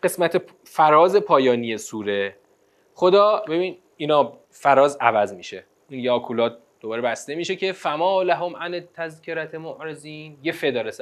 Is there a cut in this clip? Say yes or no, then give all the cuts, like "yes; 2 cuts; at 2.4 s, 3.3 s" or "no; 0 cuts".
yes; 1 cut; at 4.4 s